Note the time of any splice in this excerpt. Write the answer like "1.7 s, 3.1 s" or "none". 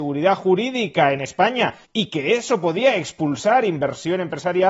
none